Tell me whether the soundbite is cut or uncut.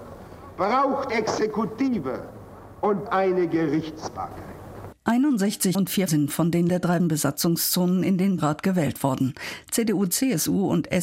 cut